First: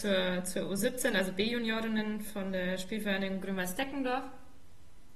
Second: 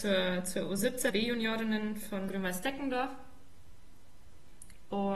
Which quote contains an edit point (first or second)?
second